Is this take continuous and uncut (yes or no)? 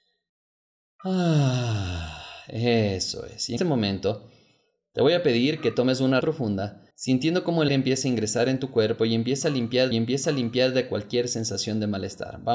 no